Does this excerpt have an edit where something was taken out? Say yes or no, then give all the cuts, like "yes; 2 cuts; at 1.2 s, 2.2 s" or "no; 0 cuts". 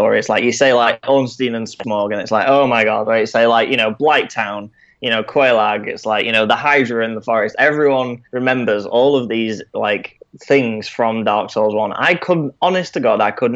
yes; 1 cut; at 8.3 s